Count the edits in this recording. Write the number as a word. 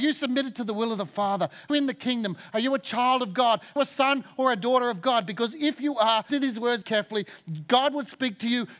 four